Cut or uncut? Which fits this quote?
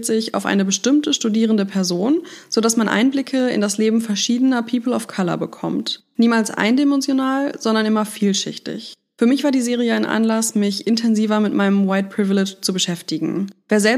uncut